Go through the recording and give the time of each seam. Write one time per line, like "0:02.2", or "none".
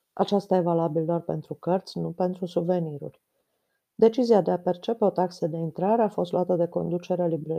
none